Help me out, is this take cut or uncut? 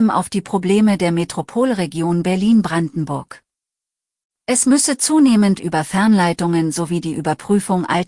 uncut